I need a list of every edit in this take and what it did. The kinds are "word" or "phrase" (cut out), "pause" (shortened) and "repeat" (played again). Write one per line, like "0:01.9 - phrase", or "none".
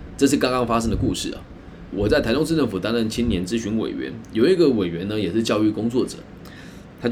0:01.9 - word